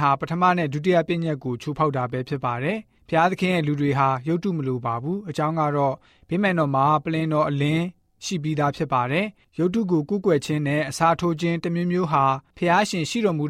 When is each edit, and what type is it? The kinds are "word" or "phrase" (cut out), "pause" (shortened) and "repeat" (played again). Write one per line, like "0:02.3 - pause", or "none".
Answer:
none